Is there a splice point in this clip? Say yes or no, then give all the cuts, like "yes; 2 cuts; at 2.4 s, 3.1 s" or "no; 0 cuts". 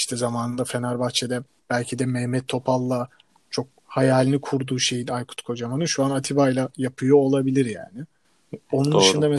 no; 0 cuts